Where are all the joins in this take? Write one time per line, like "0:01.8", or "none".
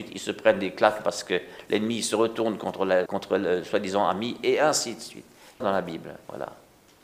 0:03.1
0:05.6